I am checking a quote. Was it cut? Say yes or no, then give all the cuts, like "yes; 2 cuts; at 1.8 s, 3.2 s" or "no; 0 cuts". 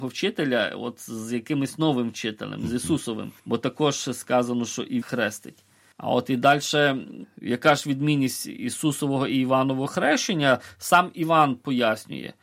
yes; 2 cuts; at 3.4 s, 5.0 s